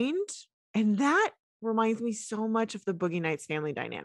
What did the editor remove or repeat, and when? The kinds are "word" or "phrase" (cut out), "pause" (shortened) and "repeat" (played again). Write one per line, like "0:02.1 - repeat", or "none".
none

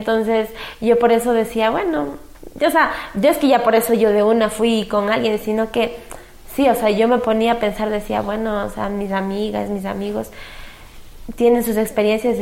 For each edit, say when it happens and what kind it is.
none

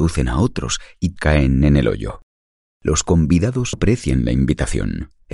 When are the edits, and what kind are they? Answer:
0:01.2 - word
0:03.7 - word

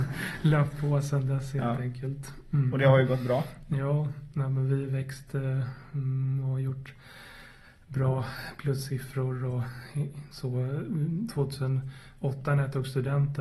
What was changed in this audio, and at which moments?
none

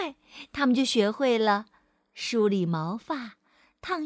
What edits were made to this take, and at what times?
none

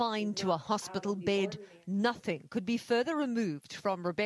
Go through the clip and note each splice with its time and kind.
none

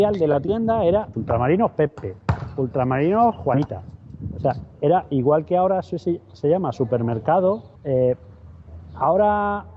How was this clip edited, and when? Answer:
0:01.1 - word
0:07.8 - pause

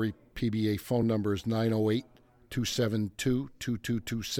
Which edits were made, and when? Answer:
none

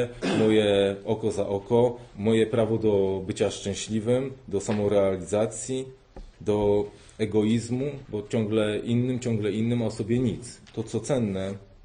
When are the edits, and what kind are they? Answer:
0:06.3 - pause

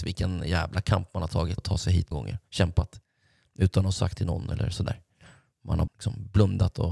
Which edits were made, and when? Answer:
0:01.6 - word
0:02.1 - word
0:04.2 - word
0:05.9 - word

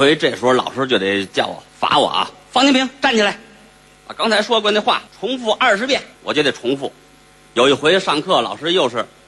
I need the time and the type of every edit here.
0:01.7 - pause
0:05.1 - pause
0:06.1 - pause

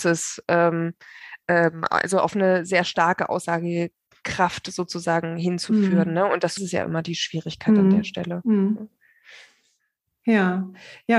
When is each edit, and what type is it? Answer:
0:06.6 - phrase

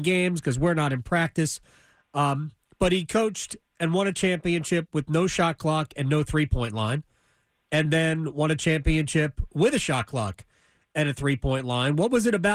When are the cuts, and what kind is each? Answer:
none

